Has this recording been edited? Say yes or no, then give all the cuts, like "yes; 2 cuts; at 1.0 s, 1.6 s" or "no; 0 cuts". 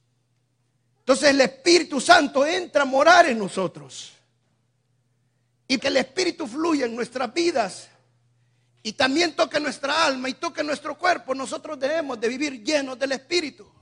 yes; 1 cut; at 5.8 s